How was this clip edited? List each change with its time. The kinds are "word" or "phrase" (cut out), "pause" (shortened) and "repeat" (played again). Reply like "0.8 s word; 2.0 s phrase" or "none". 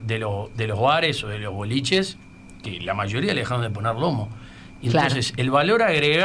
none